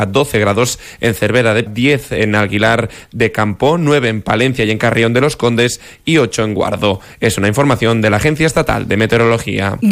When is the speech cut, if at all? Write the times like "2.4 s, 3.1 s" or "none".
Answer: 1.7 s